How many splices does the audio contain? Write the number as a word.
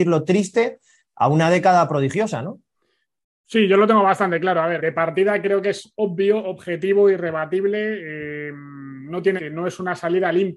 two